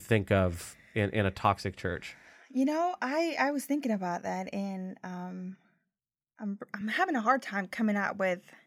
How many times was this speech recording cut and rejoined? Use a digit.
0